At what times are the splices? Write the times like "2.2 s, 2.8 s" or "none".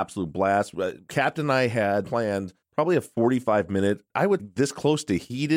2.0 s, 2.6 s, 4.1 s, 4.4 s